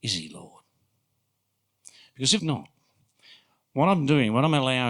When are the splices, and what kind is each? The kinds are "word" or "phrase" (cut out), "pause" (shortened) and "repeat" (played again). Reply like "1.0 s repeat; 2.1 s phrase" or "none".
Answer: 2.4 s word